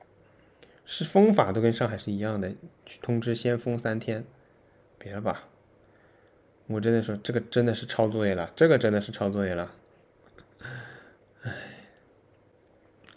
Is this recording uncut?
yes; 0 cuts

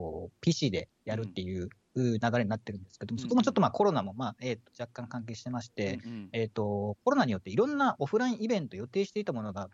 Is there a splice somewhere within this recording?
no; 0 cuts

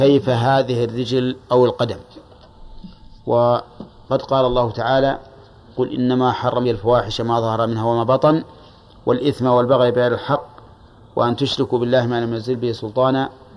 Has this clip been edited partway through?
yes; 1 cut; at 6.6 s

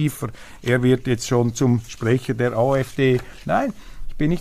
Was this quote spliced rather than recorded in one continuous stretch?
no; 0 cuts

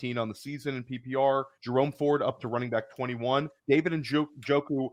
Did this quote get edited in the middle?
yes; 2 cuts; at 1.5 s, 3.6 s

